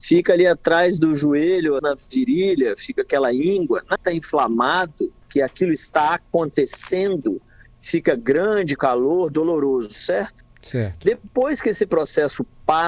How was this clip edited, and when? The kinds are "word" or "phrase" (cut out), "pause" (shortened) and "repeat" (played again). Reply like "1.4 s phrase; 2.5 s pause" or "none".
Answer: 1.8 s phrase; 4.0 s word; 5.2 s pause; 8.8 s word